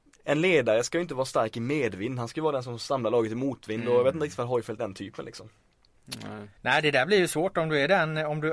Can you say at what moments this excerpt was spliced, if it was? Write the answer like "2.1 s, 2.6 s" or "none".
4.8 s, 6.6 s